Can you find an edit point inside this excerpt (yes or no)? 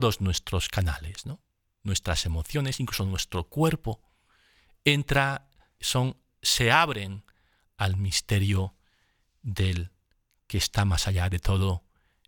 yes